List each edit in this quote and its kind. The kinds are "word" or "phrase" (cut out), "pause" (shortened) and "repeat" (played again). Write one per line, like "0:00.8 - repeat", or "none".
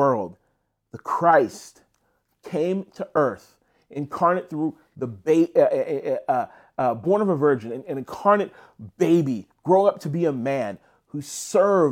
none